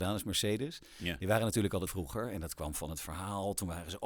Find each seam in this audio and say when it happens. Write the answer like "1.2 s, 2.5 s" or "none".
1.9 s